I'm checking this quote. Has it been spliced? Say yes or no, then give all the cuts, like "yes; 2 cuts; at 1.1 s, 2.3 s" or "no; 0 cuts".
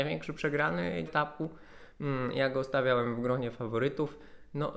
yes; 1 cut; at 1.1 s